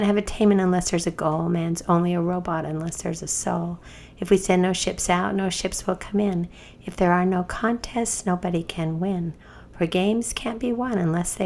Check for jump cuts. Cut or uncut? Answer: uncut